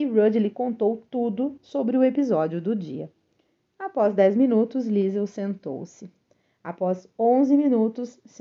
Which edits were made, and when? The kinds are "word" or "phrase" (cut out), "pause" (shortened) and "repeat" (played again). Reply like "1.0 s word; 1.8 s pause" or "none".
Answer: none

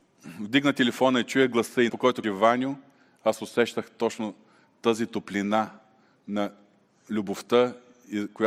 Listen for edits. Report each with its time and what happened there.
1.9 s word; 2.2 s word

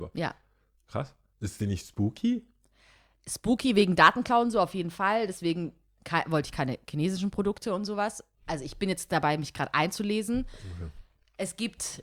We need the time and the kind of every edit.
none

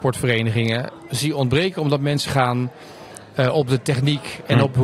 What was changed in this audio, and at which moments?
2.2 s word

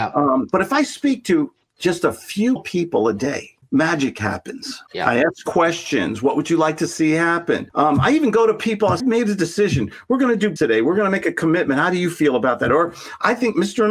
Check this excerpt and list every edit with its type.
2.6 s word; 4.9 s pause; 9.0 s word; 10.6 s word

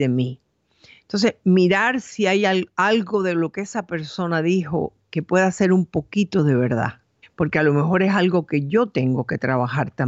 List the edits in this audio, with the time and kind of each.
7.2 s pause

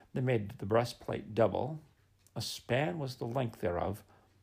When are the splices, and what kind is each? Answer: none

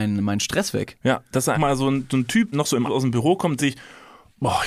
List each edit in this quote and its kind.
1.5 s word; 2.5 s word; 2.8 s phrase; 3.6 s word

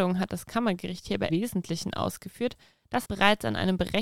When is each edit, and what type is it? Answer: 1.3 s word; 3.0 s word

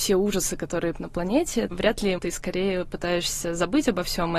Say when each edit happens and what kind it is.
0.9 s word; 1.7 s word; 2.2 s word

